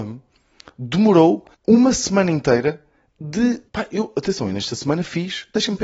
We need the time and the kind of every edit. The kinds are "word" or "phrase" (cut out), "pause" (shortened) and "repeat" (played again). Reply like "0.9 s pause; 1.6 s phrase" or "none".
1.5 s pause; 3.7 s pause